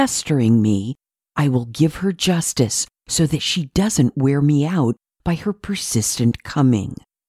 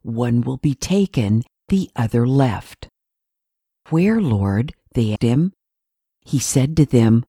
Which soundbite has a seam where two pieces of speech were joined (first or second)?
second